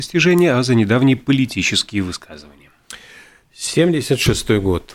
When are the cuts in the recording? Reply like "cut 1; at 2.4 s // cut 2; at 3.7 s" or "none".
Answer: none